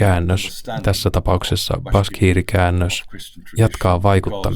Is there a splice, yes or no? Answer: no